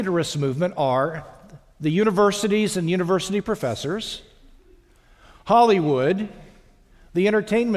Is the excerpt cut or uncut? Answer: uncut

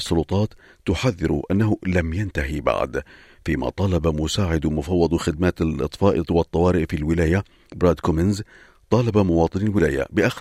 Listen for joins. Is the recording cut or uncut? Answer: uncut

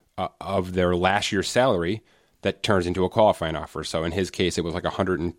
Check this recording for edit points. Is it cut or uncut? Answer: uncut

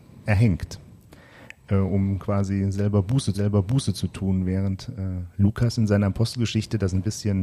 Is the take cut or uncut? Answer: cut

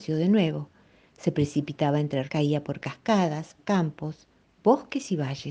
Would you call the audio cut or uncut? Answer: cut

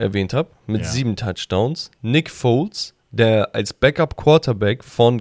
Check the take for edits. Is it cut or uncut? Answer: cut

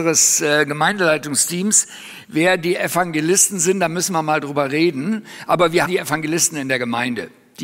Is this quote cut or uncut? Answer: cut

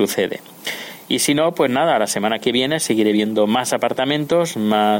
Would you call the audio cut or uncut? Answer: uncut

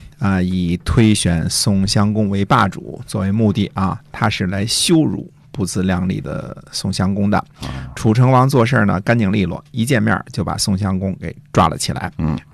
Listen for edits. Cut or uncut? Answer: uncut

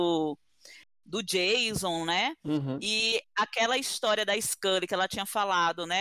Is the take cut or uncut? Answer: uncut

